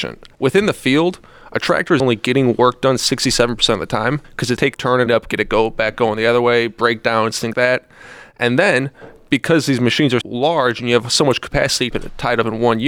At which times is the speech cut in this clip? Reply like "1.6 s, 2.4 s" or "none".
2.0 s, 4.2 s, 4.7 s, 5.1 s, 7.5 s, 10.2 s, 11.9 s